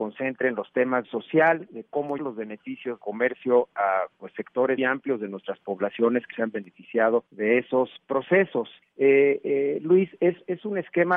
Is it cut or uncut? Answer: cut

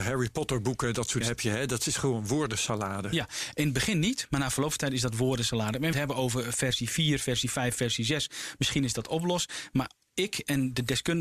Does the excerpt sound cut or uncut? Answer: cut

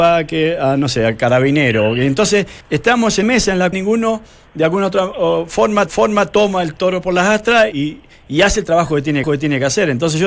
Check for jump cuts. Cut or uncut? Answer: cut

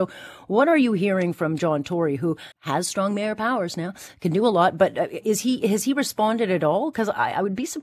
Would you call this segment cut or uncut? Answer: cut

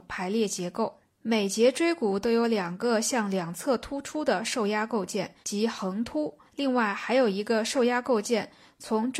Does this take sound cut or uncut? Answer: cut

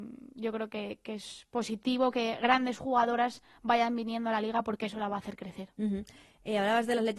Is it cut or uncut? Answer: uncut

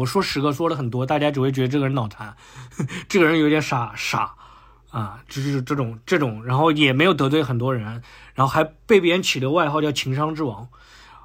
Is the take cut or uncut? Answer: uncut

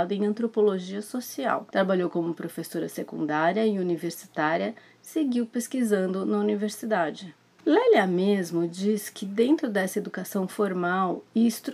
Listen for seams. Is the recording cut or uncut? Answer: uncut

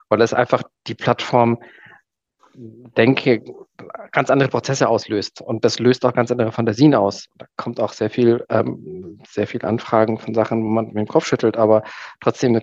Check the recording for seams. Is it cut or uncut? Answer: uncut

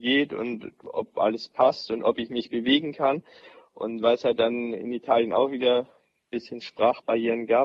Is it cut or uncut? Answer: uncut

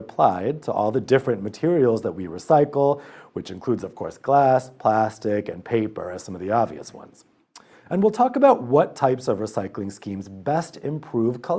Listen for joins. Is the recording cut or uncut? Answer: uncut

